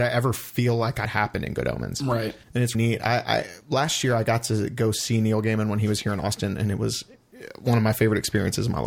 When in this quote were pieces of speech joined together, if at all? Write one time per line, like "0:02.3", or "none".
0:01.0
0:02.4
0:02.7